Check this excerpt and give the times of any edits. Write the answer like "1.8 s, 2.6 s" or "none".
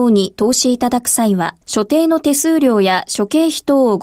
1.6 s